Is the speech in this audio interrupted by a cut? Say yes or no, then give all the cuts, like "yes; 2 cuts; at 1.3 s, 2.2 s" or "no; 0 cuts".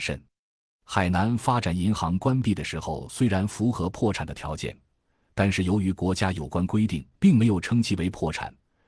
yes; 1 cut; at 7.1 s